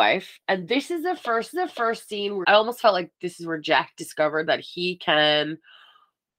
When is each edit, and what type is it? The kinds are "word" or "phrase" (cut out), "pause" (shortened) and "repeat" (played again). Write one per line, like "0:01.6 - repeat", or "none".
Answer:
0:01.5 - repeat
0:02.4 - phrase

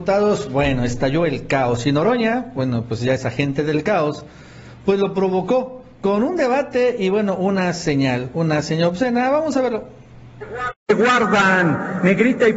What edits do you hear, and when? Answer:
0:10.8 - pause

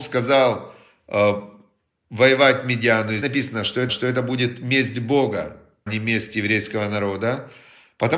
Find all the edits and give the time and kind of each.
0:03.2 - word
0:03.9 - repeat
0:05.9 - word

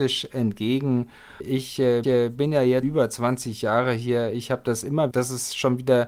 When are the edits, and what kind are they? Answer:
0:02.0 - repeat
0:02.8 - word
0:05.1 - phrase

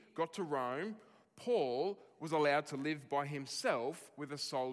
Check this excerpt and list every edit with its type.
none

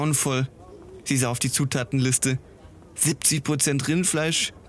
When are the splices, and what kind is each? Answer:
none

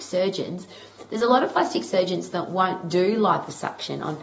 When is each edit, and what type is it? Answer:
none

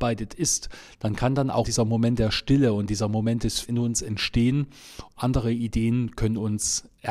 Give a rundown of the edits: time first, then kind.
0:01.6 - word
0:03.6 - word
0:05.2 - word

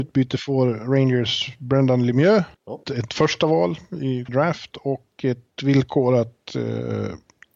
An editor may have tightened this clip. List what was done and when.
0:02.5 - pause
0:04.3 - word

